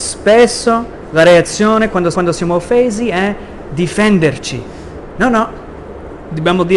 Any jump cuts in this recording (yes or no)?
yes